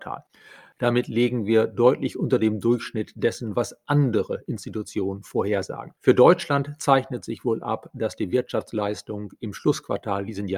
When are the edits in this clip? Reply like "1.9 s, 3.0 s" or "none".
6.0 s